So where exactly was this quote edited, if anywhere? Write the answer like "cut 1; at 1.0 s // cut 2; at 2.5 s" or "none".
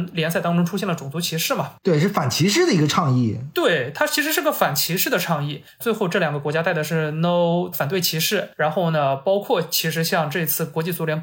cut 1; at 7.7 s